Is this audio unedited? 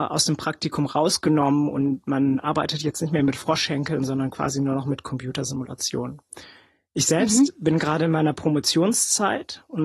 yes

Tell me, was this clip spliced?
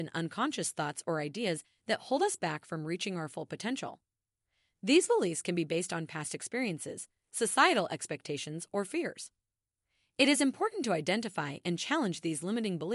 no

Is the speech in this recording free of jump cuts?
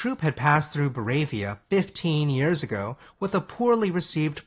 yes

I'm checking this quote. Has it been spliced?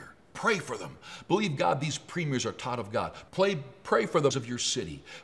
yes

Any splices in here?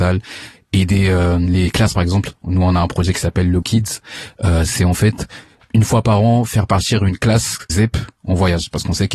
yes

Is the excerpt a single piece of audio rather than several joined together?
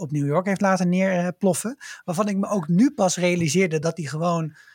yes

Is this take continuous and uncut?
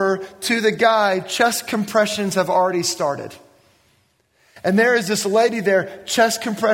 yes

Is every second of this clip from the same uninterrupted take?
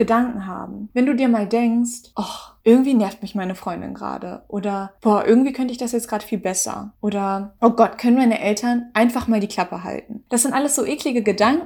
yes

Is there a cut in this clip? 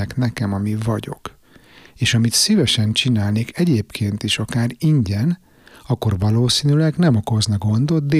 no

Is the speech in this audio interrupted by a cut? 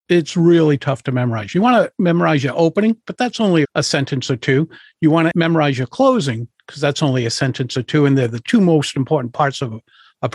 yes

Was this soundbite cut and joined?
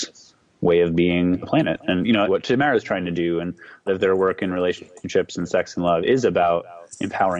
yes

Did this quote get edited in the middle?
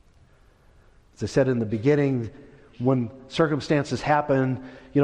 no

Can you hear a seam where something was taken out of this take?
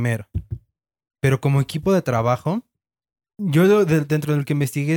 no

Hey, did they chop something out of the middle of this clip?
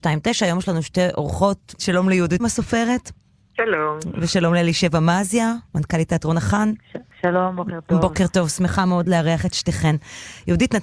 yes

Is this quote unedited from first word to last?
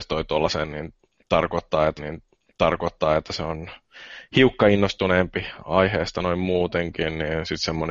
no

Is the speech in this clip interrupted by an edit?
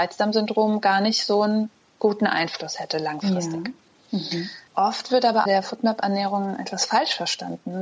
yes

